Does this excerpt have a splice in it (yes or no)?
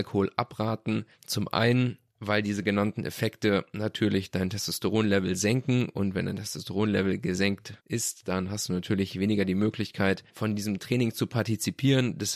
yes